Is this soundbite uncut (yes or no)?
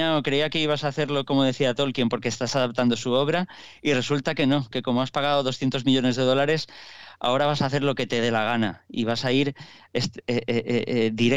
yes